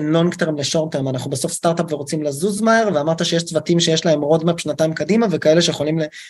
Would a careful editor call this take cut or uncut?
uncut